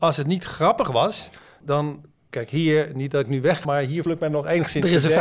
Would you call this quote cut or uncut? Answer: cut